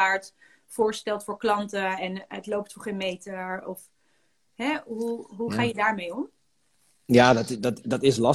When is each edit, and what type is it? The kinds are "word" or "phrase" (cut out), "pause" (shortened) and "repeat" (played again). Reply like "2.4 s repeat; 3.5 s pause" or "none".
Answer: none